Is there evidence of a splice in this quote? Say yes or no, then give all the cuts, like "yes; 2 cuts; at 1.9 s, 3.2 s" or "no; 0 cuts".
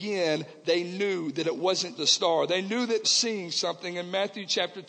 yes; 2 cuts; at 1.9 s, 3.0 s